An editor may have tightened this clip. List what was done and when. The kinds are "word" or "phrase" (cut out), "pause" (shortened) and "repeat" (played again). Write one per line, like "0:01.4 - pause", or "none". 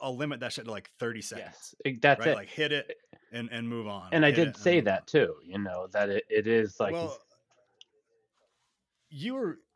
none